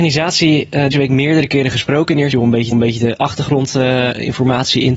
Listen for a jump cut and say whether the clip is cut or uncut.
cut